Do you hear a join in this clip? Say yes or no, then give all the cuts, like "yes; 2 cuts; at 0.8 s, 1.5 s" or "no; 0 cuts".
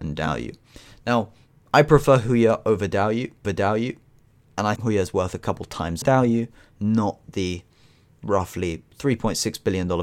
yes; 3 cuts; at 3.4 s, 4.8 s, 6.0 s